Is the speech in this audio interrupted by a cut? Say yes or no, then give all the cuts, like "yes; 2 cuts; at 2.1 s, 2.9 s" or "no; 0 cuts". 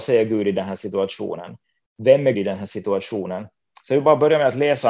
yes; 1 cut; at 2.3 s